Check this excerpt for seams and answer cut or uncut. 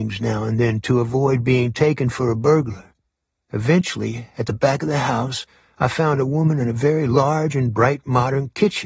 uncut